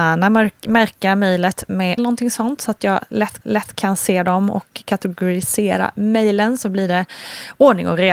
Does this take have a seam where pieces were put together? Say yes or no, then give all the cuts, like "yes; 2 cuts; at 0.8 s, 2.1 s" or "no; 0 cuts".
yes; 2 cuts; at 2.0 s, 3.4 s